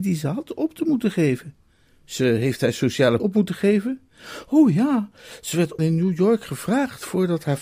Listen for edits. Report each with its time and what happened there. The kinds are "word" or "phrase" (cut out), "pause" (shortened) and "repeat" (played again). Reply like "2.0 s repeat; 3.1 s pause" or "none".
1.9 s pause; 3.2 s word; 5.8 s word